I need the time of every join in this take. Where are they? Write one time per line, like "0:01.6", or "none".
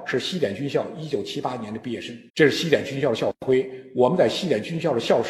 0:02.3